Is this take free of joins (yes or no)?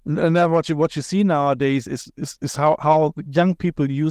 yes